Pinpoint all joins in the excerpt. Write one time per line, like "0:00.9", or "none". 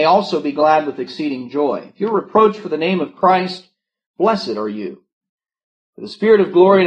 none